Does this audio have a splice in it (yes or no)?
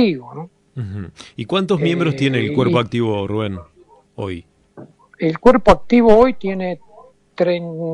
no